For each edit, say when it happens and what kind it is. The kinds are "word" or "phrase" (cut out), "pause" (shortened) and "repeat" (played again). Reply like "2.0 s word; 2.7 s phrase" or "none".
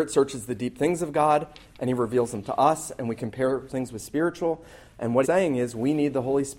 3.7 s word; 5.2 s word